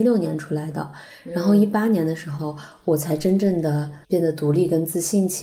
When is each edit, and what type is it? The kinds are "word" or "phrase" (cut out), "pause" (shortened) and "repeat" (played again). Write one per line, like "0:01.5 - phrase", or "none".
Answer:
0:04.0 - pause